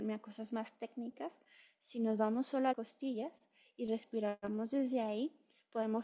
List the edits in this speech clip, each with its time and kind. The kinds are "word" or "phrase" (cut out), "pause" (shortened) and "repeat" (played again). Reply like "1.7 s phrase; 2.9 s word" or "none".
2.7 s word